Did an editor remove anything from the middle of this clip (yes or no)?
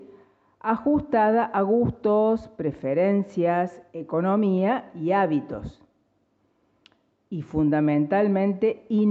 no